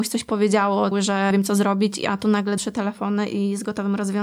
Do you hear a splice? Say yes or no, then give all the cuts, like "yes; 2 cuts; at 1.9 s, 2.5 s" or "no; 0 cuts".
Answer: yes; 3 cuts; at 0.9 s, 1.3 s, 2.6 s